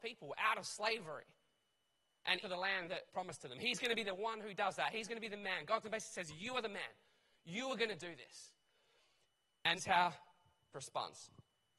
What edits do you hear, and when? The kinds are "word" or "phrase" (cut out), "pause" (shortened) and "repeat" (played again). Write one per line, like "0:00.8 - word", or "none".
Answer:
0:02.4 - word
0:03.1 - word
0:05.8 - word
0:09.8 - word
0:10.7 - word